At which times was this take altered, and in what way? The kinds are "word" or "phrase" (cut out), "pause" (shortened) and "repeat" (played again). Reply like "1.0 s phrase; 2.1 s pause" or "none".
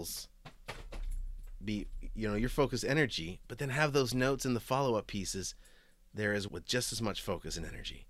6.5 s word